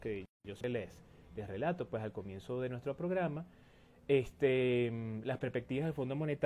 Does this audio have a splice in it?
no; 0 cuts

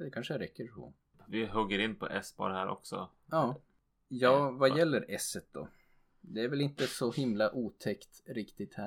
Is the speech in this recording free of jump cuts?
yes; 0 cuts

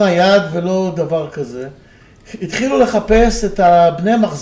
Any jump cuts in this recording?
no; 0 cuts

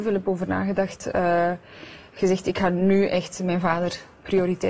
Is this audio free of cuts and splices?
yes; 0 cuts

